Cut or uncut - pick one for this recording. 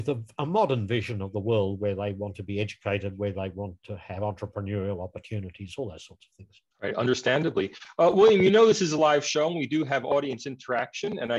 cut